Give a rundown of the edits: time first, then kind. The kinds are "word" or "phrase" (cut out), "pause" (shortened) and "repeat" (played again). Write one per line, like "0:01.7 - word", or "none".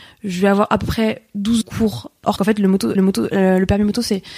0:01.6 - phrase
0:02.4 - word
0:03.0 - repeat